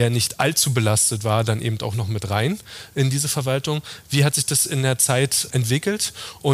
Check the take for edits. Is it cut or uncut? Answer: uncut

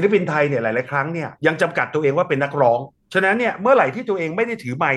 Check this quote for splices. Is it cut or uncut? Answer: cut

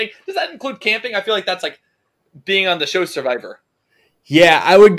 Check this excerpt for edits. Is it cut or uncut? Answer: uncut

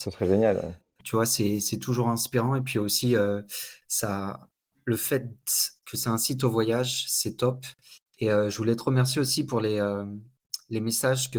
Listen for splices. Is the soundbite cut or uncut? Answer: uncut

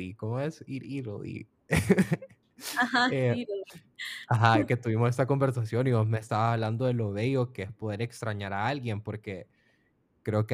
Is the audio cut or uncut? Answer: uncut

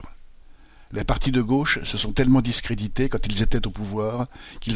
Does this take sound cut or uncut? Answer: uncut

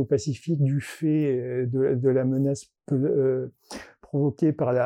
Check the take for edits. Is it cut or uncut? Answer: uncut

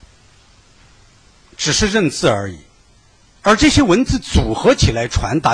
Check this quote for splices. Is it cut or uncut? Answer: uncut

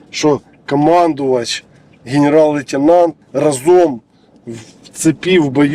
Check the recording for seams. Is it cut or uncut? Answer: cut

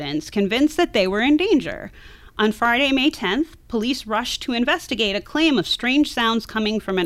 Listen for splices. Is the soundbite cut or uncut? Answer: uncut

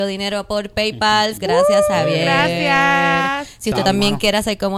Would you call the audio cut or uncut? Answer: cut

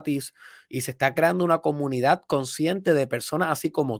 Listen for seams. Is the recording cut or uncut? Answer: uncut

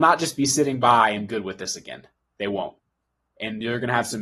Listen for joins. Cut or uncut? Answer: cut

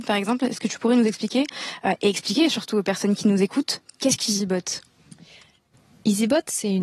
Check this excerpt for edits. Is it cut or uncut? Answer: uncut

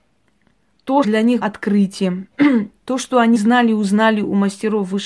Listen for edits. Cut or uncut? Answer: cut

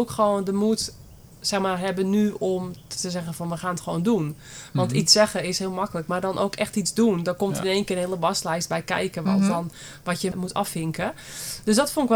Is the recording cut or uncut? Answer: uncut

